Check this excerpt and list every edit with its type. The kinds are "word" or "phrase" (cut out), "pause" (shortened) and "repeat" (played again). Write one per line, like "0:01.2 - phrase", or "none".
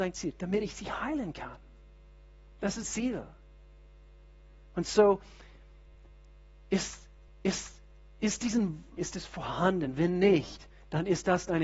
0:02.8 - word
0:07.3 - repeat
0:09.0 - phrase